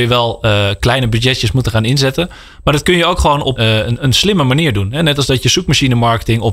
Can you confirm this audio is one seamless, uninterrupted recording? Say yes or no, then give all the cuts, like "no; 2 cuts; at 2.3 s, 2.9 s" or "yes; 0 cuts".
no; 1 cut; at 3.6 s